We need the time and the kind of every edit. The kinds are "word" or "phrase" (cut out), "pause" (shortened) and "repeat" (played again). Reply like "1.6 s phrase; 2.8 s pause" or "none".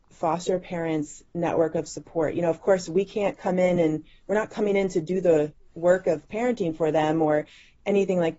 none